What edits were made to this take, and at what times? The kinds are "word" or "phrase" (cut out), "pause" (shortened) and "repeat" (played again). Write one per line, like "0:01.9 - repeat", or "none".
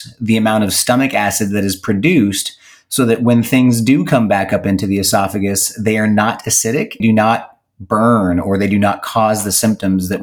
0:07.0 - phrase